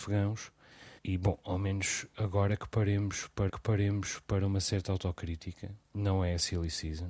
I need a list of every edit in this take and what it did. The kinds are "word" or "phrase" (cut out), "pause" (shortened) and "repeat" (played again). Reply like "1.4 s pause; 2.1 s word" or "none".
1.0 s pause; 3.5 s repeat; 5.8 s pause